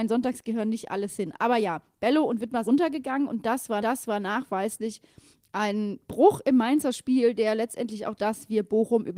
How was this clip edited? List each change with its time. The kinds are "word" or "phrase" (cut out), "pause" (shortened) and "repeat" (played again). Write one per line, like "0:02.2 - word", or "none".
0:02.6 - word
0:03.8 - repeat
0:08.2 - phrase